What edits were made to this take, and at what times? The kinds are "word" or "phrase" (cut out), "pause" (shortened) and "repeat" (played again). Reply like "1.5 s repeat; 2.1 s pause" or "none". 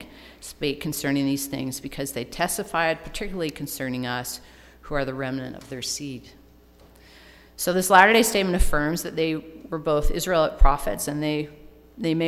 none